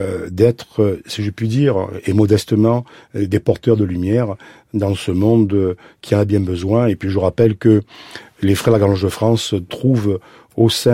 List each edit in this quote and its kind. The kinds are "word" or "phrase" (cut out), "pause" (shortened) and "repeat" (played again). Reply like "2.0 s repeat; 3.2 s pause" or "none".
none